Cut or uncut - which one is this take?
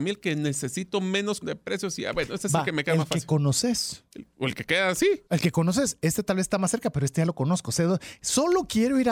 cut